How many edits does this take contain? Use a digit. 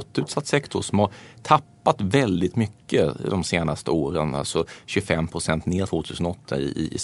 1